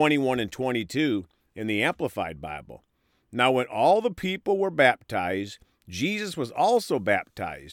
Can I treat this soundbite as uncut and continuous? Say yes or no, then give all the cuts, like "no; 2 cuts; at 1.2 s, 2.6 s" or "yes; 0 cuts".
yes; 0 cuts